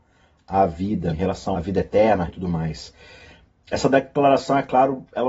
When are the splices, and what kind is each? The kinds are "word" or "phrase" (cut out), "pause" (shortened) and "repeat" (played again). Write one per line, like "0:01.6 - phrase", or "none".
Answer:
0:01.1 - word
0:01.5 - word
0:02.3 - word